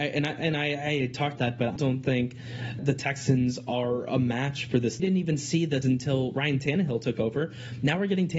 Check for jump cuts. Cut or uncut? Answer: cut